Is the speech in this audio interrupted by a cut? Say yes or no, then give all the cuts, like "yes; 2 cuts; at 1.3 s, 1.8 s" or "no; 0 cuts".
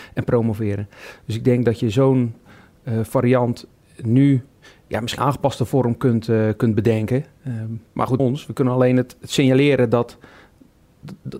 yes; 3 cuts; at 5.2 s, 7.9 s, 8.2 s